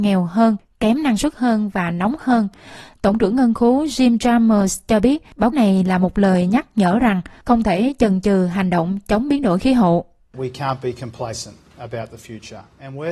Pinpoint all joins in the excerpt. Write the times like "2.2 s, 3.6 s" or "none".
5.5 s